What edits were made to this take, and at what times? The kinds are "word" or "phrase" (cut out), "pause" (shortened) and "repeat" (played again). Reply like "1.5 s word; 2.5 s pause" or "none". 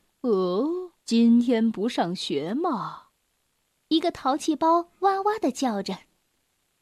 1.0 s pause; 3.2 s pause